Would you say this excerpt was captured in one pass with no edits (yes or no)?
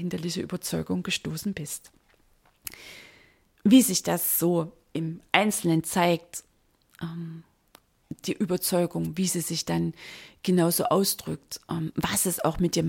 yes